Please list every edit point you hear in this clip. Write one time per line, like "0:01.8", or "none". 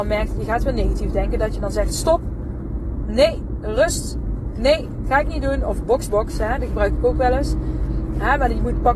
0:06.1